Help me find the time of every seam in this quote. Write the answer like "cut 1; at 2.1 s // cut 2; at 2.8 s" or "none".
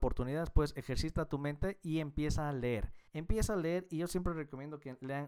cut 1; at 3.1 s